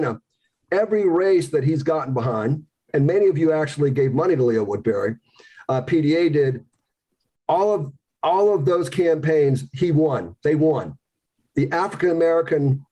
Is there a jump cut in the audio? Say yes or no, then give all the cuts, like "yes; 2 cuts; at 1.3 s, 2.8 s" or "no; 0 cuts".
no; 0 cuts